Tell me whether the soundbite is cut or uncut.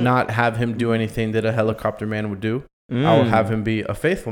uncut